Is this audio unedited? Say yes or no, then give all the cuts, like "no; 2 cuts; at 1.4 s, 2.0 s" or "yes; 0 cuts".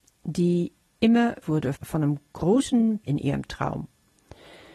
no; 3 cuts; at 1.4 s, 1.7 s, 3.0 s